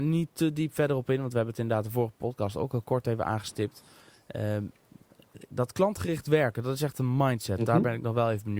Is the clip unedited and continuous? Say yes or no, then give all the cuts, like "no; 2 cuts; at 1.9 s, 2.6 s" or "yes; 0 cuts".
yes; 0 cuts